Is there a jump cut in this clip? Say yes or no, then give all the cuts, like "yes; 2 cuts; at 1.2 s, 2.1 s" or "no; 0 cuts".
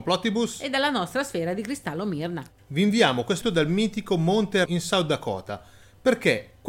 yes; 2 cuts; at 3.4 s, 4.7 s